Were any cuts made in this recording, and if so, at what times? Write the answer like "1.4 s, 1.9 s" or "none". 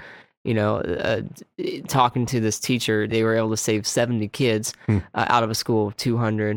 3.1 s